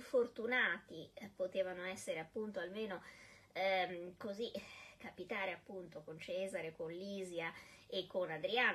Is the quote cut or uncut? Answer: uncut